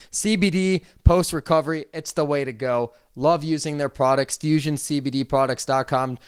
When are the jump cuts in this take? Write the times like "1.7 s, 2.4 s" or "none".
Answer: none